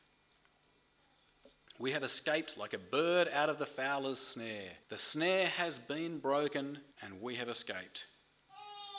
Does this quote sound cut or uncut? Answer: cut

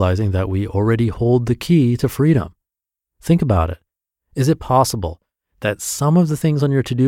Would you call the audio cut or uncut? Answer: uncut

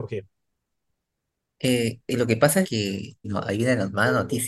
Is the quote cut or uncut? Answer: cut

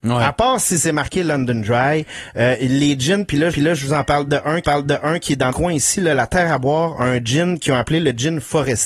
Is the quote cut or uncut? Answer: cut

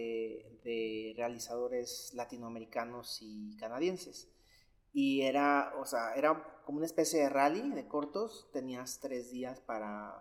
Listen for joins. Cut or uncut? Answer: uncut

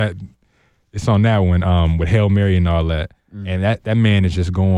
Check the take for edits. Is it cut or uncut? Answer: cut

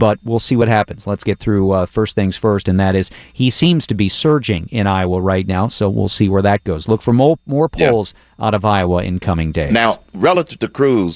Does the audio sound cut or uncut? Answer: uncut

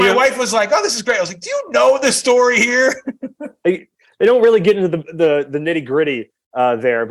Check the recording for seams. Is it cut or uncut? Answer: uncut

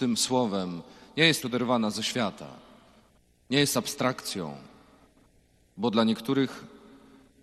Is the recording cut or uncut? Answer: cut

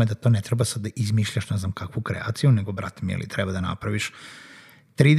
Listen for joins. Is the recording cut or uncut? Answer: uncut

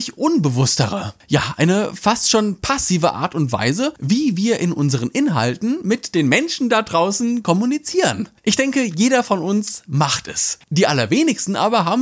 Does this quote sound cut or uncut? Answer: cut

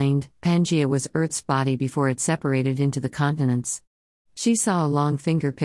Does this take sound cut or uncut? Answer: uncut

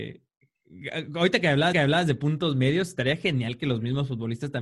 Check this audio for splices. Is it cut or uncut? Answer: cut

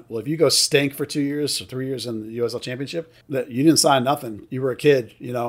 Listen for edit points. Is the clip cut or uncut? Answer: cut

